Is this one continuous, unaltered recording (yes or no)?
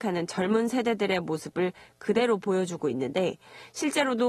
yes